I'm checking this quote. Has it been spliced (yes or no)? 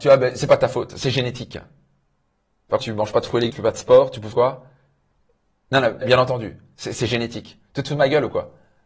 yes